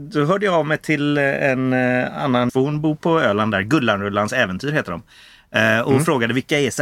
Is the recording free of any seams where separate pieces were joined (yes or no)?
no